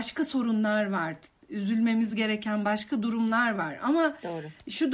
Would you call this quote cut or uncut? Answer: uncut